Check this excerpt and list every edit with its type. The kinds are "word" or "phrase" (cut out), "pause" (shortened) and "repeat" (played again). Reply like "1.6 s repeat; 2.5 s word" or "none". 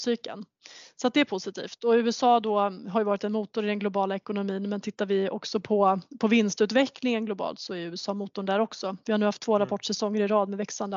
none